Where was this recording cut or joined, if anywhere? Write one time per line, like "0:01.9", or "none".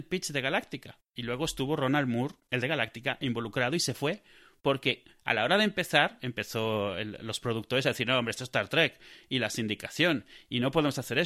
none